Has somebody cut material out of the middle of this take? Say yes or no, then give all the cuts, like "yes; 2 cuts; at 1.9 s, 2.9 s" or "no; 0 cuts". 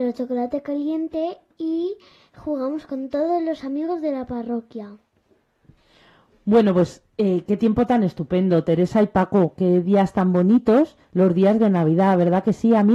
yes; 1 cut; at 11.0 s